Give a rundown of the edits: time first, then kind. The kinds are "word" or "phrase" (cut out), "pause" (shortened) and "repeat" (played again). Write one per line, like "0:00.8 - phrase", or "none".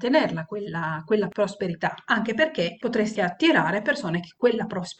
0:03.2 - word